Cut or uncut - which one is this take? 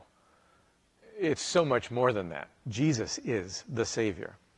uncut